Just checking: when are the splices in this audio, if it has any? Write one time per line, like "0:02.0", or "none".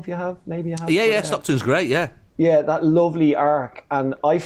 none